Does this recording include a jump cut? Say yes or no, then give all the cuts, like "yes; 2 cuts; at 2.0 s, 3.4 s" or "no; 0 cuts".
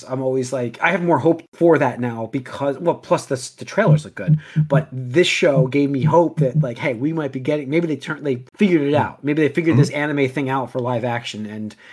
yes; 2 cuts; at 1.5 s, 8.5 s